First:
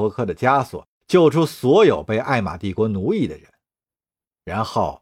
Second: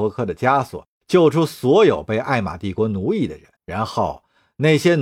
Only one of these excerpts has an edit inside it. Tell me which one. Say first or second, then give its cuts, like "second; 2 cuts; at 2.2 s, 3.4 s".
second; 1 cut; at 3.6 s